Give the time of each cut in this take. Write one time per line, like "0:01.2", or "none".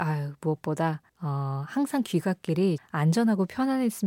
0:01.1
0:02.8

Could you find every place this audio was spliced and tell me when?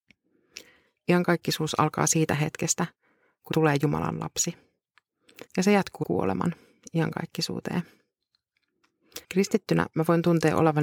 0:03.5
0:05.5
0:06.0
0:09.2

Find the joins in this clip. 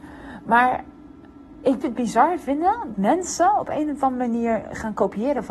0:01.8
0:02.9

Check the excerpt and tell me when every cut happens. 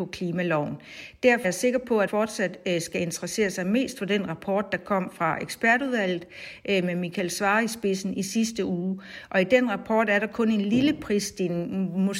0:01.4
0:02.1

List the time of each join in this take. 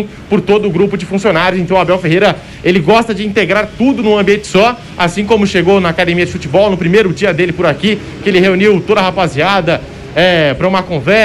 none

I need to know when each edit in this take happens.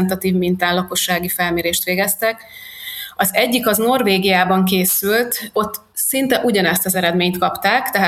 none

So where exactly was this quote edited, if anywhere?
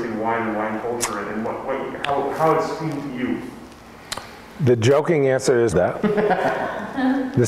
0:05.7

